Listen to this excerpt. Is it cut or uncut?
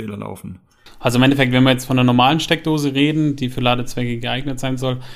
uncut